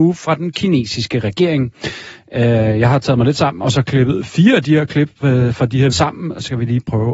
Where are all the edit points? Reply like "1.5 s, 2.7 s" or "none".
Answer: 5.9 s